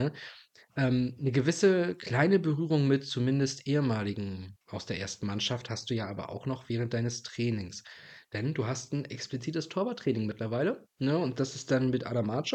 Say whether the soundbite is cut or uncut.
cut